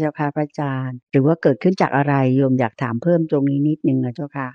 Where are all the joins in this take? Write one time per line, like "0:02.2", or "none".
0:01.0